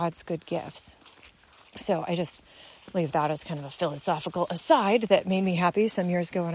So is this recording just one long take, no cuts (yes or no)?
yes